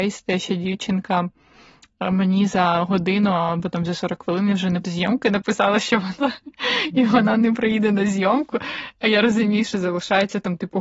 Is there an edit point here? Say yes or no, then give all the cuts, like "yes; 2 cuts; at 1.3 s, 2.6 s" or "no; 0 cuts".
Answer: yes; 2 cuts; at 4.8 s, 6.2 s